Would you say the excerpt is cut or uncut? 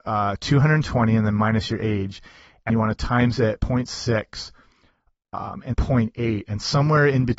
cut